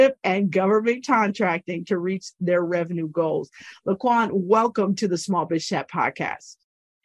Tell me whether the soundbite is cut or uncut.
uncut